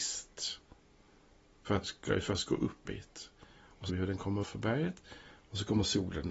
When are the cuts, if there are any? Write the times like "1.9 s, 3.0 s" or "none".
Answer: 1.8 s, 2.9 s, 3.9 s, 4.4 s